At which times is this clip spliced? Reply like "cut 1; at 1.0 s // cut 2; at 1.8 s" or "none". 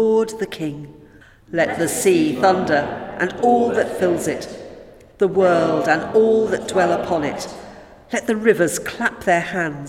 cut 1; at 1.2 s